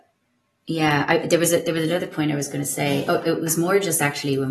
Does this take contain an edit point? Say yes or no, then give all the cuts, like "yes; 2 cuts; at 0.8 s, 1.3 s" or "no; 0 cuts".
no; 0 cuts